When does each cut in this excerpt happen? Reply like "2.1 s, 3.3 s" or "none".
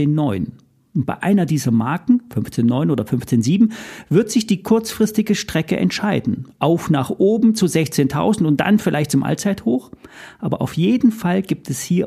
none